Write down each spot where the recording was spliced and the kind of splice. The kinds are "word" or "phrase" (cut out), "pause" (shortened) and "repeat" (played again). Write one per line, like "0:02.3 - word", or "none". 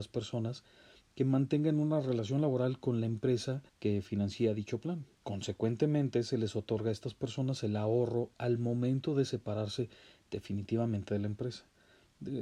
0:03.7 - pause
0:05.1 - pause